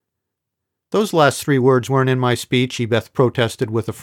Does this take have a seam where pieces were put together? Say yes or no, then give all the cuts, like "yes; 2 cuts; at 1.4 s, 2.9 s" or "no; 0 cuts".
no; 0 cuts